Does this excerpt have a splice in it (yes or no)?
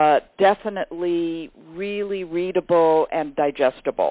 no